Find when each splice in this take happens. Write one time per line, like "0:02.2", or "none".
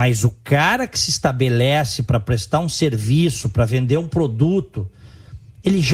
none